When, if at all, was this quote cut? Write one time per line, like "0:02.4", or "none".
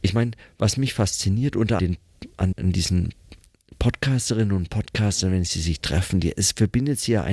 0:01.8
0:02.5